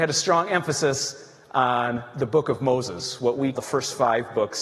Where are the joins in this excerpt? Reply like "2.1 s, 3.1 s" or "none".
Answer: 3.5 s